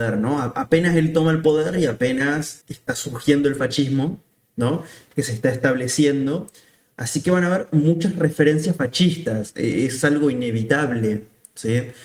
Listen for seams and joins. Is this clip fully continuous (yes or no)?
no